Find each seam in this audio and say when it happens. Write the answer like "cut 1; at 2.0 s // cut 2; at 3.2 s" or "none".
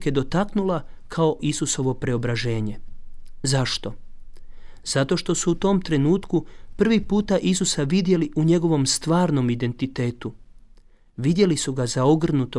cut 1; at 1.4 s